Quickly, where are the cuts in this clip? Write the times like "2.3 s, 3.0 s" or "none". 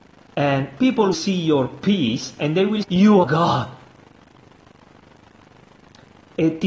1.1 s, 2.8 s, 3.2 s